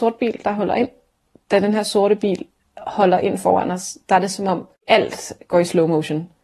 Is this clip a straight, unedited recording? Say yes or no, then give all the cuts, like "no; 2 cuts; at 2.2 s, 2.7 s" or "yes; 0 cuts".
yes; 0 cuts